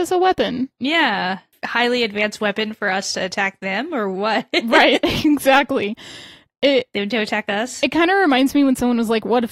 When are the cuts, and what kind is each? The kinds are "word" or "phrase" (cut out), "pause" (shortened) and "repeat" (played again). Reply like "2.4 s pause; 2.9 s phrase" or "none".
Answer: none